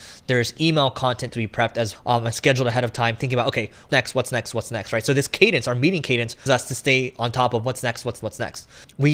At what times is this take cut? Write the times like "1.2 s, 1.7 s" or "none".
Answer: 1.3 s, 2.0 s, 3.9 s, 6.5 s, 8.2 s

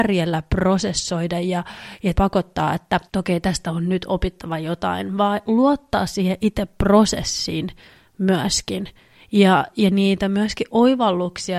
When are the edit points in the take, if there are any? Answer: 3.1 s

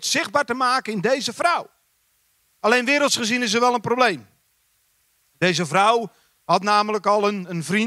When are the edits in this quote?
none

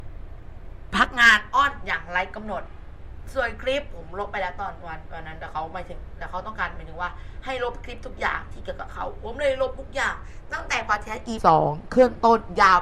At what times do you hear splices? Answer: 11.4 s

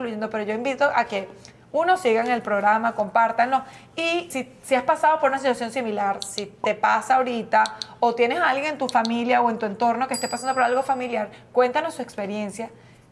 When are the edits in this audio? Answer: 4.3 s

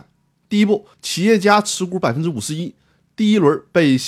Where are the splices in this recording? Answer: 0.9 s

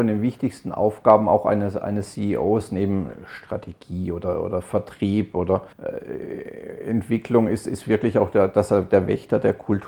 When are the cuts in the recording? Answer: 5.7 s

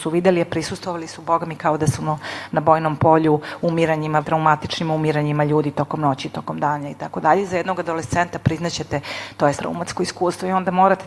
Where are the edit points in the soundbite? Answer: 4.2 s, 9.6 s

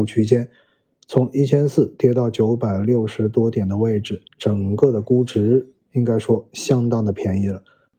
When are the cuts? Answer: 4.3 s

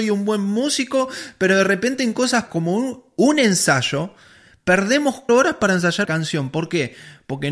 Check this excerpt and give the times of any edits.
2.5 s, 5.3 s, 6.0 s

